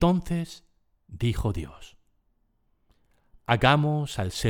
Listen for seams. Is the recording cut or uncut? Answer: uncut